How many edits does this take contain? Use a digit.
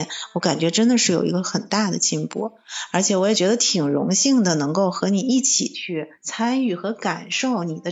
1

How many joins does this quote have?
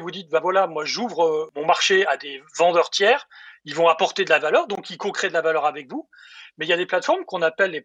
0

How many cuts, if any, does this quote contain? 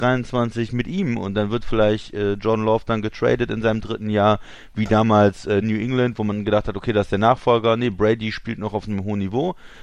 1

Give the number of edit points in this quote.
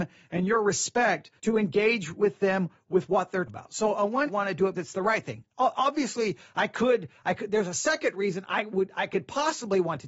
4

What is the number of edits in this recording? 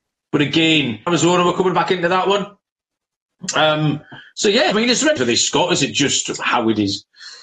3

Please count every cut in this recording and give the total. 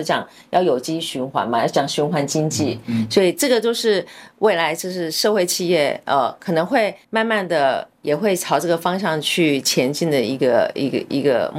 1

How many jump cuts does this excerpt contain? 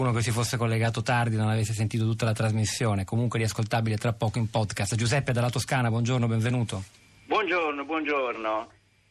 0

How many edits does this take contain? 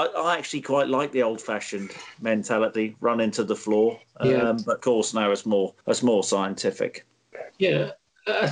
2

